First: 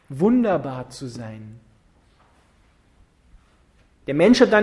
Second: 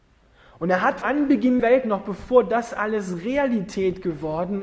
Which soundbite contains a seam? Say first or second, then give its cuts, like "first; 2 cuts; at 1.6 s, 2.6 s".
second; 2 cuts; at 1.0 s, 1.6 s